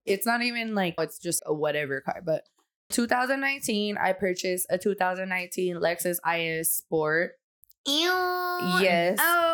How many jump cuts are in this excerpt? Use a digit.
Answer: 3